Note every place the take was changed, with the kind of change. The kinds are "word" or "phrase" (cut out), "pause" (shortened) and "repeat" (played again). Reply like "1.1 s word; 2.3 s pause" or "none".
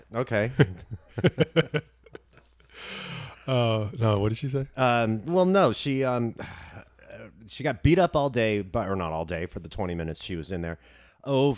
none